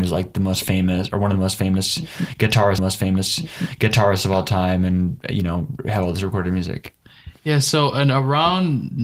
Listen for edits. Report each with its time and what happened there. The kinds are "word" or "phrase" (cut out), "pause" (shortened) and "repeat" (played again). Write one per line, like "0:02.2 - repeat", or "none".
0:02.8 - repeat